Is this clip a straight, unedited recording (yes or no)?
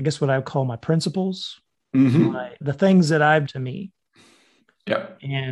no